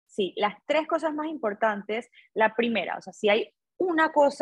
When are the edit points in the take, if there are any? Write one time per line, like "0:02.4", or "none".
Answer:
none